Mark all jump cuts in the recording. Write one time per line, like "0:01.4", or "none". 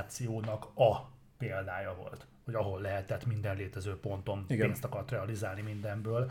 none